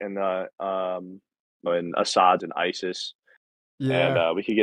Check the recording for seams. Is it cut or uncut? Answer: cut